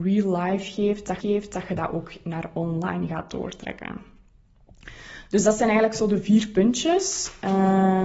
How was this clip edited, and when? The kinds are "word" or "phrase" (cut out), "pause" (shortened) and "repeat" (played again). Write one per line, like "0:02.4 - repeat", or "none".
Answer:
0:01.2 - repeat